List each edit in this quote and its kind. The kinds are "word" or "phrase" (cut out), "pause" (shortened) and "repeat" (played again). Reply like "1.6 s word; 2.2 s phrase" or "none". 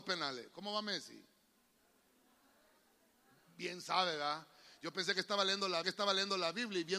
5.8 s repeat